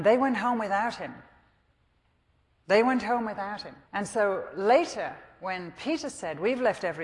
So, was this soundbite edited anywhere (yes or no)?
yes